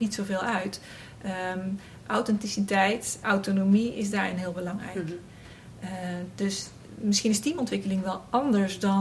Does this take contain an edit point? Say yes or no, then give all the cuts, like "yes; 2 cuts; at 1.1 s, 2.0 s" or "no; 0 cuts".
yes; 1 cut; at 3.2 s